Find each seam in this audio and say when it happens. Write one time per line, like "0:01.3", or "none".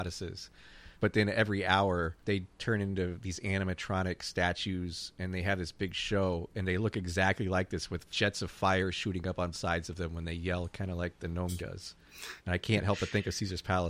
0:00.9
0:02.2
0:08.1
0:09.5
0:11.6
0:12.4